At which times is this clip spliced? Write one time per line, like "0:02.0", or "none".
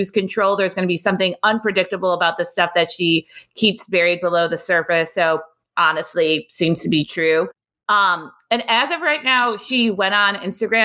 none